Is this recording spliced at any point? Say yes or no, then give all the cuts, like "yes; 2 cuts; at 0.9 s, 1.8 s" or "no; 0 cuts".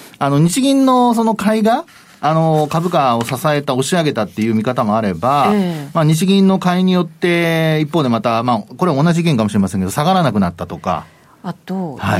no; 0 cuts